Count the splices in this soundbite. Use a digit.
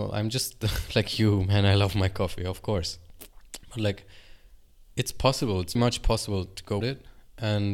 2